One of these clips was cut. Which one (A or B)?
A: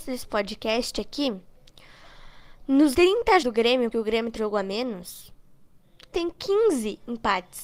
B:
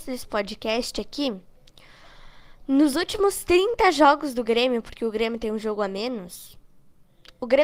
A